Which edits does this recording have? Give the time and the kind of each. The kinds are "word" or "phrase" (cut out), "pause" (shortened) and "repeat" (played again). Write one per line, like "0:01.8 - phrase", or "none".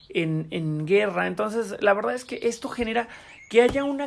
none